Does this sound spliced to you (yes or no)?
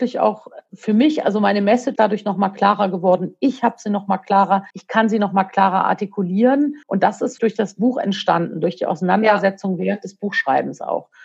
yes